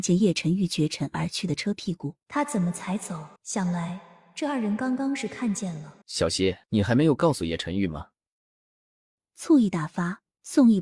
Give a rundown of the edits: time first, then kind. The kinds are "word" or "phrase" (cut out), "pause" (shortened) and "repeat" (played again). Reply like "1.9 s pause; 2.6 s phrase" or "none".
2.2 s pause; 3.4 s pause; 6.0 s pause; 6.6 s pause